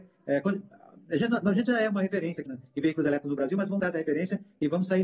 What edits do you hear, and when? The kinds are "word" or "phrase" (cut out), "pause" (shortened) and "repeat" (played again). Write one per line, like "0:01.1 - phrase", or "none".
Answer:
0:02.5 - word
0:03.8 - word